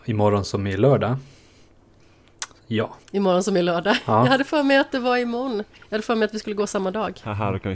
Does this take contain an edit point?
yes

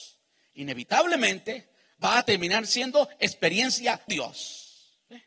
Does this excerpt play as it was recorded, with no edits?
no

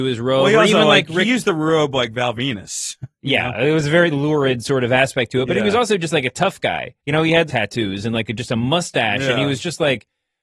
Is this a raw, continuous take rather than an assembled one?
no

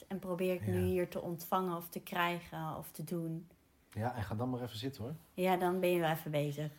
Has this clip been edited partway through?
no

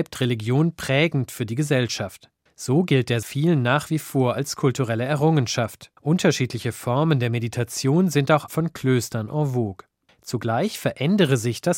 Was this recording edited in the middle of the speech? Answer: yes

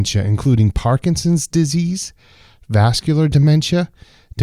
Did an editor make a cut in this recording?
no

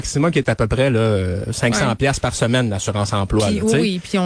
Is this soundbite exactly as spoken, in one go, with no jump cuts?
yes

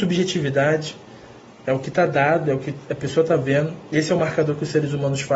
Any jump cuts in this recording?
no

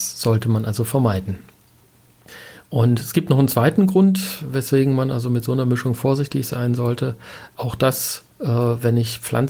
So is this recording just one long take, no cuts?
no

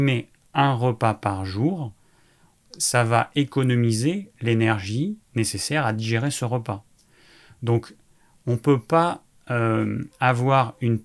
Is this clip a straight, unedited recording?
yes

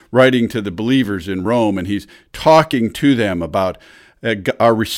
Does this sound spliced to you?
no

